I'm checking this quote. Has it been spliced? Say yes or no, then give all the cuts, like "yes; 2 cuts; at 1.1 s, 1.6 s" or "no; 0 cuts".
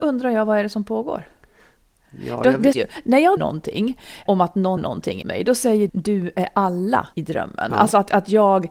yes; 7 cuts; at 2.7 s, 3.4 s, 4.3 s, 4.8 s, 5.2 s, 5.9 s, 7.1 s